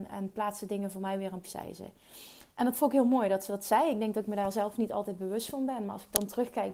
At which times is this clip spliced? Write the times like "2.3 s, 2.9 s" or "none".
1.4 s, 2.5 s